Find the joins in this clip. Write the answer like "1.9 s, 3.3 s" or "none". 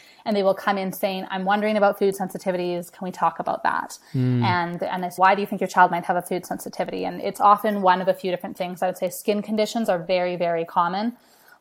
5.2 s